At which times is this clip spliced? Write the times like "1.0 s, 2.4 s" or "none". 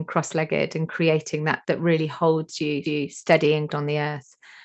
1.6 s, 2.8 s, 3.7 s